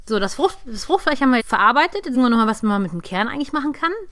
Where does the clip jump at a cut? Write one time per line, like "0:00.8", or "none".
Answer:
0:01.4
0:02.1